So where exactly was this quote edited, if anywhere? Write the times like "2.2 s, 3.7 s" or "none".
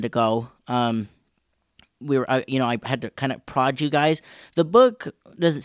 none